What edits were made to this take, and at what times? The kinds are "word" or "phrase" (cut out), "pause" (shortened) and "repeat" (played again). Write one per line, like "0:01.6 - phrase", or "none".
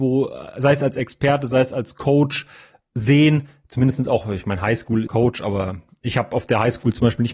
0:05.1 - phrase